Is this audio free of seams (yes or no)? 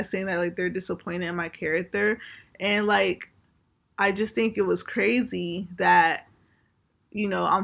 yes